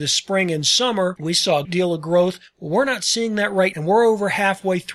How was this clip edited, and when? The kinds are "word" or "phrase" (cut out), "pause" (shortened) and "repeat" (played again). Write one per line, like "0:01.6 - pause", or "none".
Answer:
0:01.6 - word
0:03.7 - word